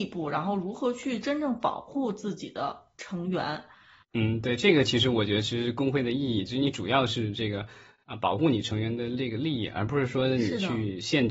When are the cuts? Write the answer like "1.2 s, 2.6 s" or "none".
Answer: none